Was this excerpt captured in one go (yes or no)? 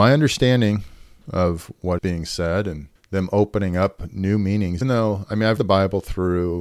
no